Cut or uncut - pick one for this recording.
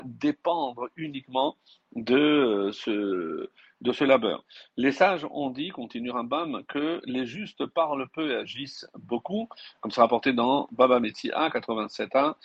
uncut